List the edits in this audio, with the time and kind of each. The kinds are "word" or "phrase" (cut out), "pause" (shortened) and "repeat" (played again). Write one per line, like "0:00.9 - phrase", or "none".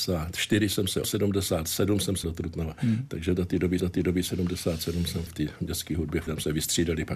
0:01.0 - word
0:02.2 - word
0:03.8 - repeat
0:05.3 - word
0:06.3 - word